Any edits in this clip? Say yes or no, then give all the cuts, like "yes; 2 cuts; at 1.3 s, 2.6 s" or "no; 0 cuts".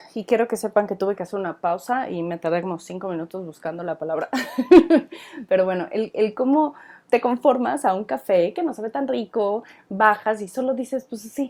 no; 0 cuts